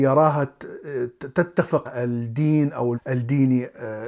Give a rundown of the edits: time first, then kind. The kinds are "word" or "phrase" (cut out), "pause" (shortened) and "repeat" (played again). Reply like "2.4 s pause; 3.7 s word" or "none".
1.8 s word; 2.9 s word